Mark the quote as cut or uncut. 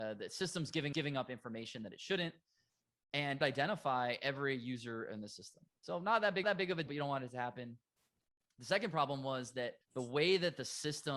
cut